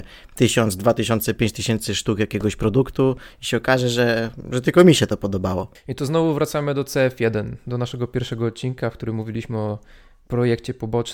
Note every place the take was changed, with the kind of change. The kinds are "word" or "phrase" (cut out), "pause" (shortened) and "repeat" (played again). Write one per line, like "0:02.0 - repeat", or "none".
none